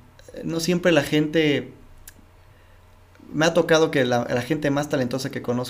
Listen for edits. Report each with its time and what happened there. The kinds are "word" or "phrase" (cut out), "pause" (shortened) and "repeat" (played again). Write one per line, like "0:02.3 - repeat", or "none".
none